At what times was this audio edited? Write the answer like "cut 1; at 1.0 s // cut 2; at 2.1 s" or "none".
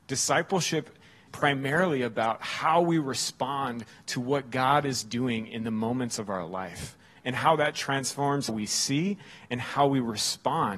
cut 1; at 1.3 s // cut 2; at 8.5 s